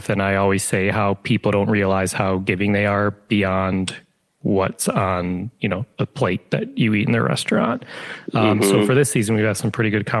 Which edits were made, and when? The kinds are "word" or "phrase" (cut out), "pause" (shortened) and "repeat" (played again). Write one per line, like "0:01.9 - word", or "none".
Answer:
none